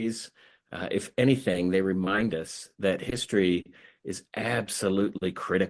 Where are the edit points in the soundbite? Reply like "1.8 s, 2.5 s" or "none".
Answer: none